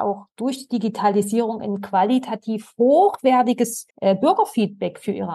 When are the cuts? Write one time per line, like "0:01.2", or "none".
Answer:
0:03.9